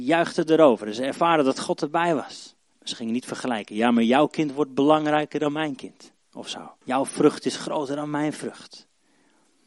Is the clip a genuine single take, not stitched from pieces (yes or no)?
no